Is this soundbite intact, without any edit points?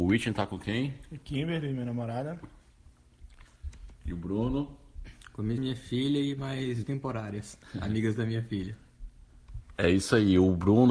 no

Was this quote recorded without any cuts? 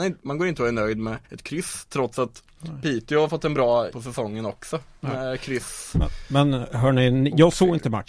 no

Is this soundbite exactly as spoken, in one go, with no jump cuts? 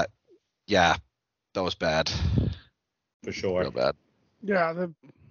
yes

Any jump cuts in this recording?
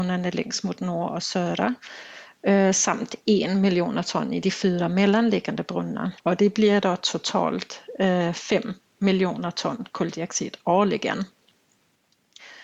yes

